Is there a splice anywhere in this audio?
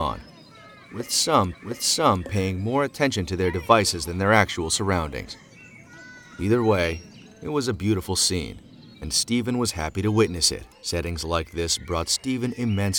yes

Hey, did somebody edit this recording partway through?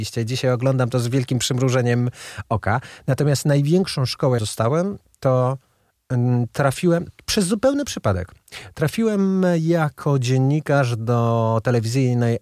yes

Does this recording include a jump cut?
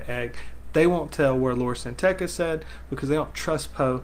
no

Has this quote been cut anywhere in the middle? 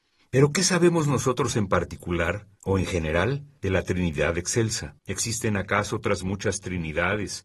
yes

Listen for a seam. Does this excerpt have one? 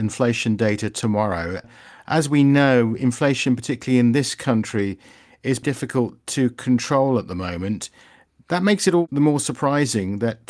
no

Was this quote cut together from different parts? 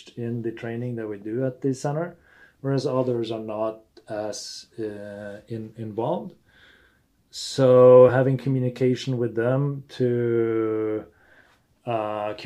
no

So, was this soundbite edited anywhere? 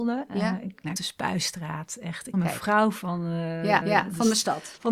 yes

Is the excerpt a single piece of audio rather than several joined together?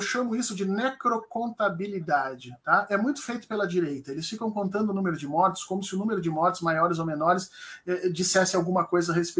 yes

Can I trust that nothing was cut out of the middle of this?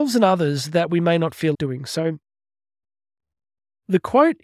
no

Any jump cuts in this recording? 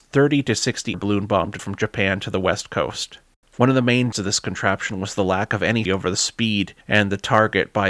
yes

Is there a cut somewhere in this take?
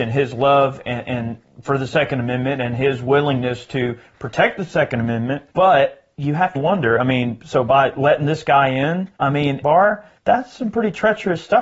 yes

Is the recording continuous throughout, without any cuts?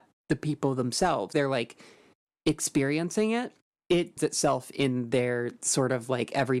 no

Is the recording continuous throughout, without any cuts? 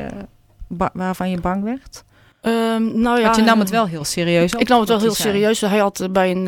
yes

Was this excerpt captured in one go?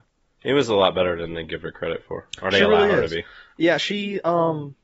yes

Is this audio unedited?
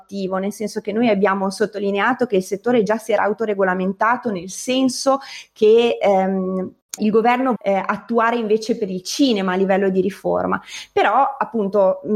no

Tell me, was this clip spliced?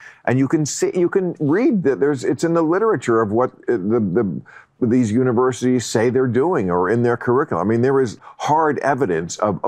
yes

